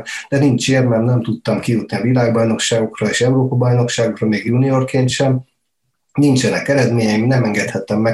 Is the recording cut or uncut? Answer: uncut